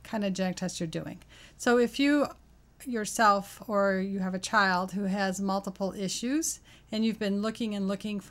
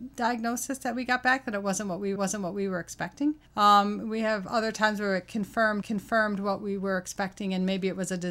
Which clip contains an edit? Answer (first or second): second